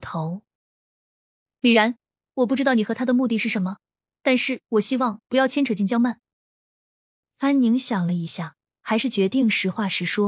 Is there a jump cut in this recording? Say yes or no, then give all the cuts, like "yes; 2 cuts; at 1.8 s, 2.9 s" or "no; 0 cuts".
no; 0 cuts